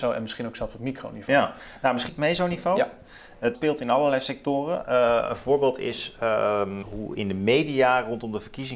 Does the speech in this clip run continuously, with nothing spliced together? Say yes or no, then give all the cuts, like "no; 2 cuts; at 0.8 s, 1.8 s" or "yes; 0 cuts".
no; 3 cuts; at 2.1 s, 3.5 s, 6.8 s